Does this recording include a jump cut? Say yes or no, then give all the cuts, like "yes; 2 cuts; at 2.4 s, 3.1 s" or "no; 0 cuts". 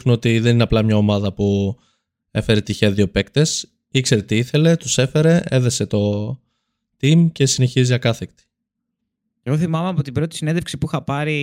no; 0 cuts